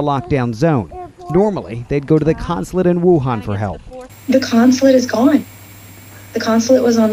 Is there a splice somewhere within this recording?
no; 0 cuts

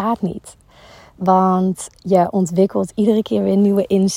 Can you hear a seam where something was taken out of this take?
no; 0 cuts

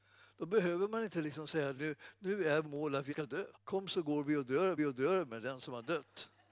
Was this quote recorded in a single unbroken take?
no; 5 cuts; at 1.8 s, 2.6 s, 3.1 s, 3.5 s, 4.8 s

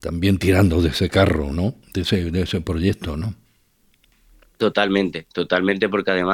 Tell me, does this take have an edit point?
no; 0 cuts

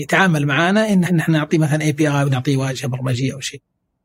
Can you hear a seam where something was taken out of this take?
yes; 1 cut; at 1.1 s

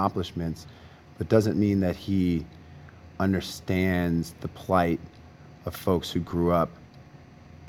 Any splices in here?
no; 0 cuts

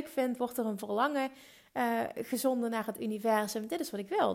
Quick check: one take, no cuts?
yes; 0 cuts

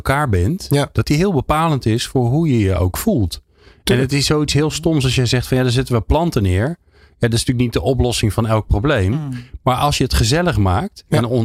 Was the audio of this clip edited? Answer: no; 0 cuts

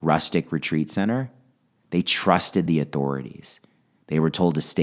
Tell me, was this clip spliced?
no; 0 cuts

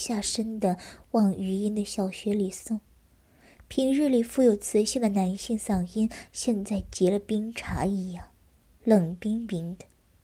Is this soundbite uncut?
yes; 0 cuts

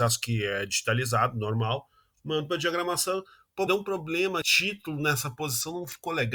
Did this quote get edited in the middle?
yes; 2 cuts; at 3.7 s, 4.4 s

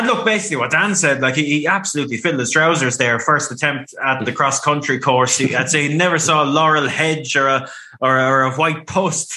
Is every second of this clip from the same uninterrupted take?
yes; 0 cuts

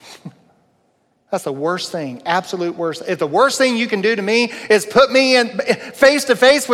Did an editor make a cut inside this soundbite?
no; 0 cuts

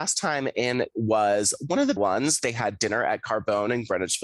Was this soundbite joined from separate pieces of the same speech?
yes; 2 cuts; at 0.9 s, 2.0 s

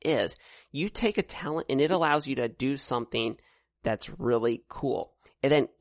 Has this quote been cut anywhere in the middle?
no; 0 cuts

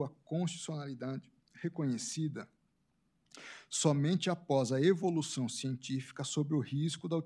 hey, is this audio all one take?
no; 1 cut; at 1.4 s

